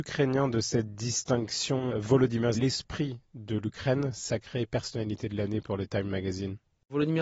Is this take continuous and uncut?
no; 1 cut; at 2.5 s

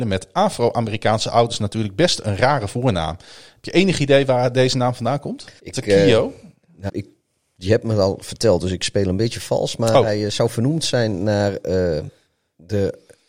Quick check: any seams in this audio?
yes; 2 cuts; at 5.6 s, 6.9 s

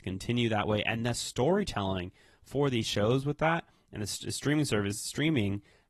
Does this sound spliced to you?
no; 0 cuts

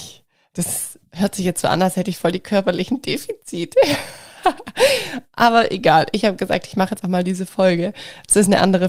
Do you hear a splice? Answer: yes; 1 cut; at 7.0 s

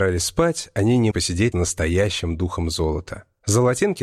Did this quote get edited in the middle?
yes; 2 cuts; at 1.1 s, 1.5 s

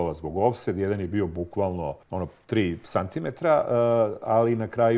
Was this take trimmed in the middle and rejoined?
yes; 1 cut; at 2.0 s

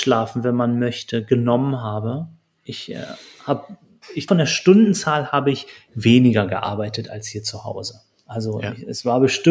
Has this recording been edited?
yes; 1 cut; at 4.3 s

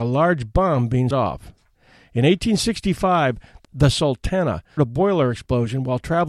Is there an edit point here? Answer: yes; 3 cuts; at 1.1 s, 3.6 s, 4.8 s

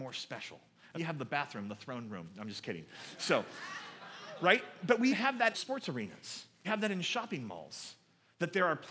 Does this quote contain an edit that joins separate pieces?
yes; 4 cuts; at 0.9 s, 5.1 s, 5.5 s, 6.6 s

